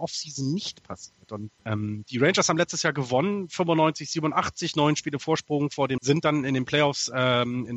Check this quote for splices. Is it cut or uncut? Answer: cut